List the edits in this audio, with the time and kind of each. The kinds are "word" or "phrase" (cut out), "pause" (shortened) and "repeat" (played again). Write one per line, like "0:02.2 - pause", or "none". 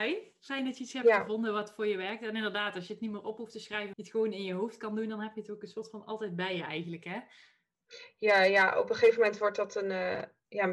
0:03.9 - word